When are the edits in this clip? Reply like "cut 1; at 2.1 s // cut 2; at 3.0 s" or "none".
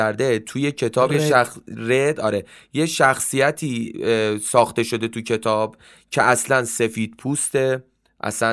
none